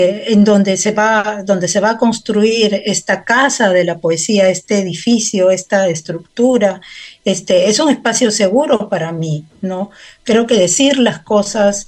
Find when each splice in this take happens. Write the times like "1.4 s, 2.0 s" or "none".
none